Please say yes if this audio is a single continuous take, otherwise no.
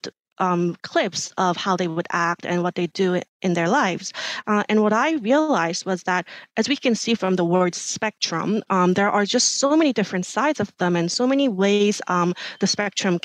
yes